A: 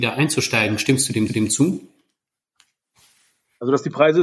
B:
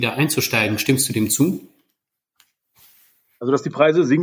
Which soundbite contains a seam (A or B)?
A